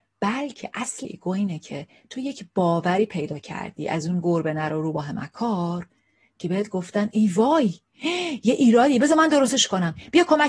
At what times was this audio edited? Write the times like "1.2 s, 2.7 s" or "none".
1.0 s